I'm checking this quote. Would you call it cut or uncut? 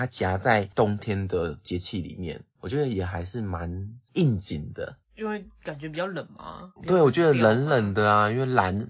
cut